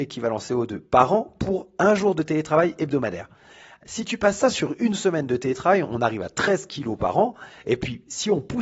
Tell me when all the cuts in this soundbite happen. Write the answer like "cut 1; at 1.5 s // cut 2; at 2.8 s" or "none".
none